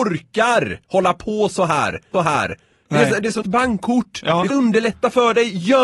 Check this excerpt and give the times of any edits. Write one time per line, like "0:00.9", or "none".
0:02.1
0:03.4
0:04.5